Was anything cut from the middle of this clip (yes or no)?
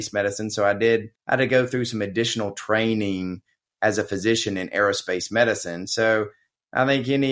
yes